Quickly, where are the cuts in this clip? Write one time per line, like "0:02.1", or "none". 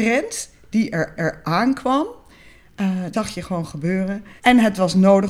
0:01.2
0:03.1
0:04.4